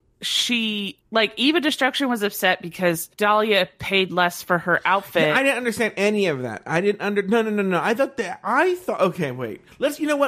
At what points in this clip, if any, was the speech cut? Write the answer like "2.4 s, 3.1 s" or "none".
1.0 s, 3.1 s

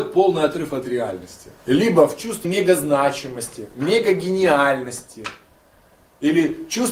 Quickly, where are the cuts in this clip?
1.6 s, 2.4 s

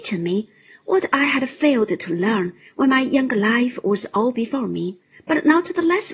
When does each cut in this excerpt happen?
none

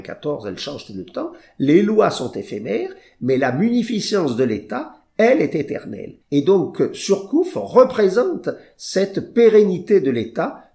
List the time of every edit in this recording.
6.2 s

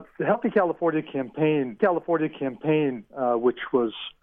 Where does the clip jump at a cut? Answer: 1.8 s

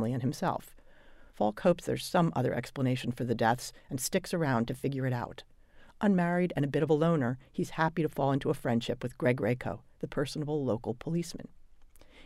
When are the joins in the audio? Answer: 1.3 s

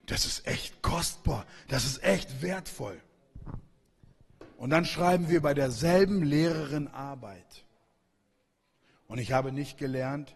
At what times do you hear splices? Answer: 6.9 s

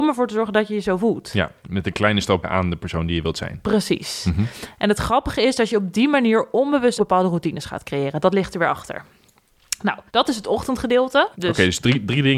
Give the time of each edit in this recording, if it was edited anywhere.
1.6 s, 2.4 s, 7.0 s, 10.1 s, 11.3 s

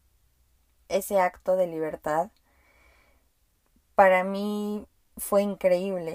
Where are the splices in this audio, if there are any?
none

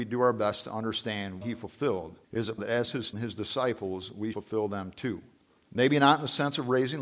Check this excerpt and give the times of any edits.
1.4 s, 2.2 s, 2.6 s, 3.1 s, 4.3 s, 5.4 s

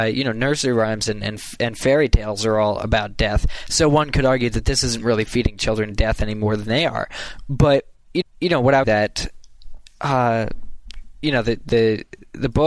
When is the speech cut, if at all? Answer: 8.2 s, 8.8 s

